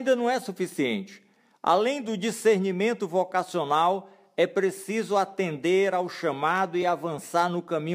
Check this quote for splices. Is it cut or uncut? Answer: uncut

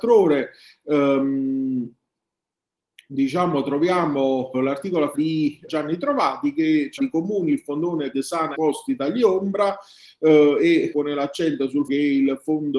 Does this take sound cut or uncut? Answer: cut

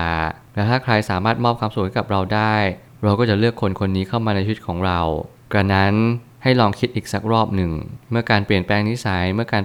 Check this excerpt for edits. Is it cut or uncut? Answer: uncut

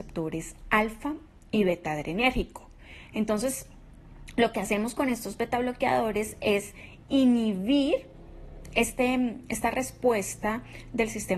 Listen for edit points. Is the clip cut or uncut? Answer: uncut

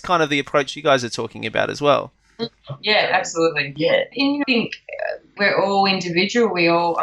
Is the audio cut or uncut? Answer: cut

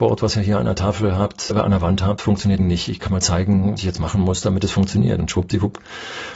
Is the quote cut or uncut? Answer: cut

